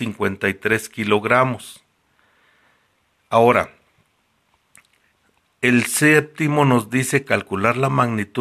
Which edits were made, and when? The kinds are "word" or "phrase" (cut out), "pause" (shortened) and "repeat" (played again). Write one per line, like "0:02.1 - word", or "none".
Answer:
none

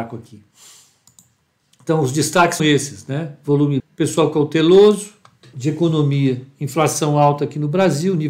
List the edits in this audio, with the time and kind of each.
0:02.6 - word
0:03.8 - word
0:05.5 - word

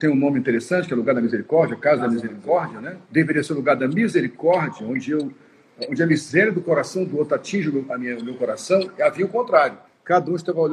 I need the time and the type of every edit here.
0:03.0 - pause
0:09.8 - pause

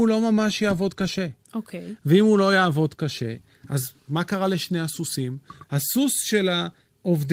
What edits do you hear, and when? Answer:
none

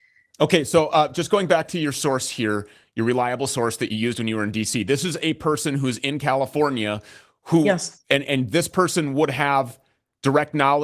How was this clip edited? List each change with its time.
none

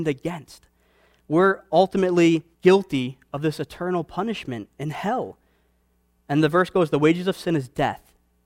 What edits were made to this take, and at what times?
0:02.5 - pause

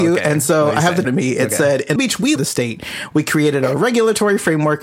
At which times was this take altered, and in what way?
0:01.0 - phrase
0:02.0 - word
0:02.4 - phrase

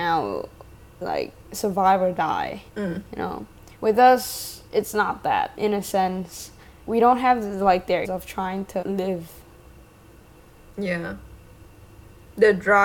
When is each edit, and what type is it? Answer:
0:01.0 - phrase
0:02.7 - pause
0:03.8 - pause
0:04.7 - pause
0:05.6 - phrase
0:06.8 - pause
0:08.0 - word
0:08.8 - word

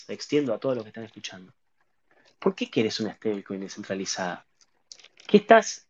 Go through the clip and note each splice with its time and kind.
none

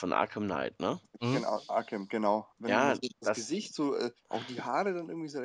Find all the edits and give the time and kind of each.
0:02.5 - pause
0:04.2 - pause

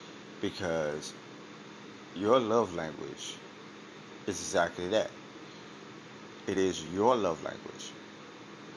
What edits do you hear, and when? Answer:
none

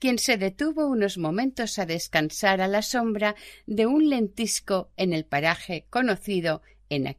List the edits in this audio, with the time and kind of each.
none

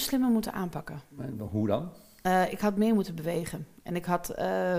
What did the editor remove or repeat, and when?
none

